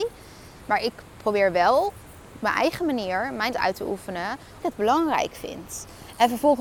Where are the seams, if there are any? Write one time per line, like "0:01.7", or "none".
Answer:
0:03.5
0:04.6